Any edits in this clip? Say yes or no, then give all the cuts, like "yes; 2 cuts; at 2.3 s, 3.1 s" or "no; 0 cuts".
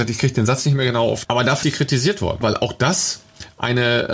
yes; 3 cuts; at 1.2 s, 1.6 s, 2.4 s